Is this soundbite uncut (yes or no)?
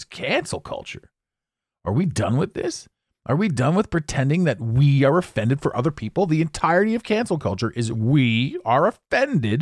yes